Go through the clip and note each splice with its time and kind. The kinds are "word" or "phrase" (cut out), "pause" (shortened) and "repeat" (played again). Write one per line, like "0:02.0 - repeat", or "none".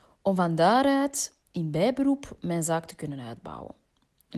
0:01.4 - pause